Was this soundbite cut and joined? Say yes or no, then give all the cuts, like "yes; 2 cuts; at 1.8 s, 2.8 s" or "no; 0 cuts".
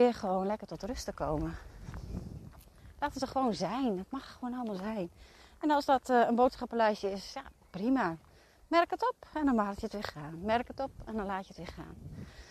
no; 0 cuts